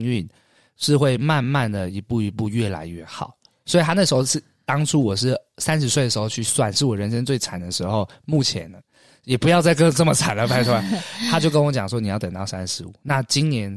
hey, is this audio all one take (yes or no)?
yes